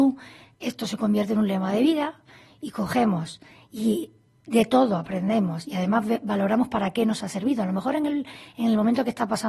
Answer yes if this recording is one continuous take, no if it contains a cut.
yes